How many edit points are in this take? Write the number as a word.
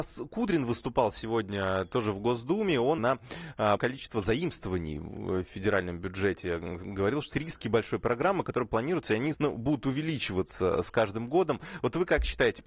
four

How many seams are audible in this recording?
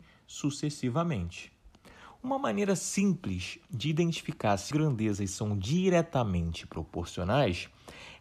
one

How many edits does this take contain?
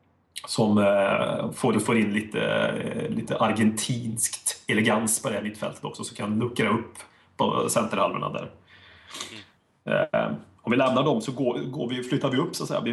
one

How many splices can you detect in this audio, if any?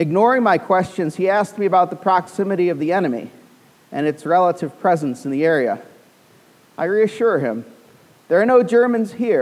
zero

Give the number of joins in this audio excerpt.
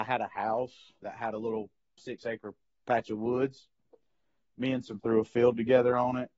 three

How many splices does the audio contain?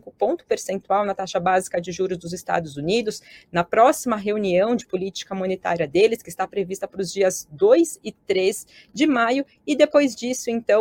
zero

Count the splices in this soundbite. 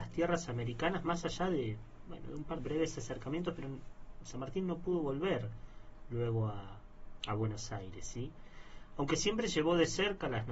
two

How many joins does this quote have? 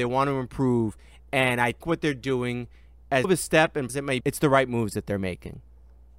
four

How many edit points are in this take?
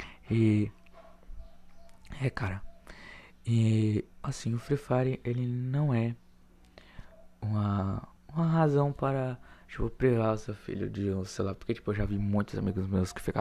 two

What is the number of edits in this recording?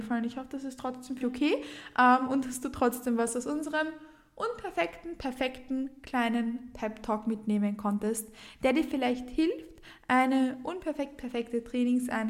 one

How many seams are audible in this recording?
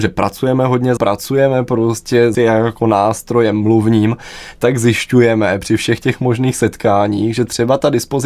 two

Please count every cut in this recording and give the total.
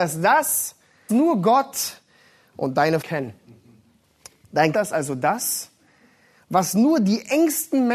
four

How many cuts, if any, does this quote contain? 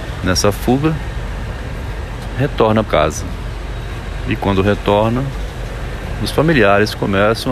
one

